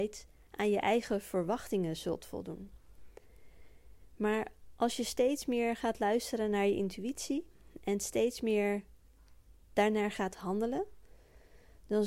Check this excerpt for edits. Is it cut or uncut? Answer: uncut